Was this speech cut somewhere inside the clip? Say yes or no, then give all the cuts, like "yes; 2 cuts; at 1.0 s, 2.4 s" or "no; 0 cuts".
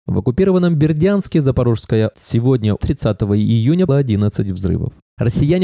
yes; 3 cuts; at 2.1 s, 2.8 s, 3.9 s